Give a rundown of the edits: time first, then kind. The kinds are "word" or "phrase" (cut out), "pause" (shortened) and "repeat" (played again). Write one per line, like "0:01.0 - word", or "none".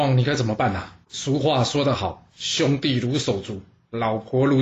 0:01.0 - pause